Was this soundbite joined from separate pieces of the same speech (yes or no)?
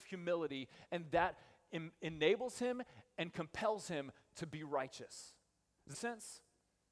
yes